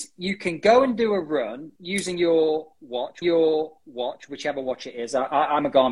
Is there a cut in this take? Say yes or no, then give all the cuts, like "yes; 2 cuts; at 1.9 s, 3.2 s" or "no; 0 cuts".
yes; 2 cuts; at 1.8 s, 3.2 s